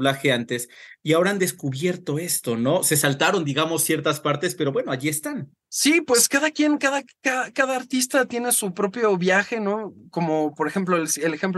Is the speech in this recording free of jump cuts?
no; 1 cut; at 5.6 s

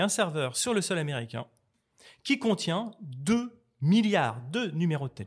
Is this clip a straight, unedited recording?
yes; 0 cuts

